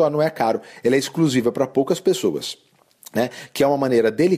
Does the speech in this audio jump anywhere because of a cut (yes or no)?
no